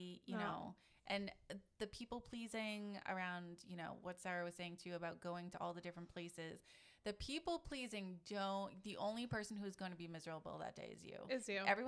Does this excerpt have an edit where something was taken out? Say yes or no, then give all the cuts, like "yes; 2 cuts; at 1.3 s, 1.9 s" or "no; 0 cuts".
no; 0 cuts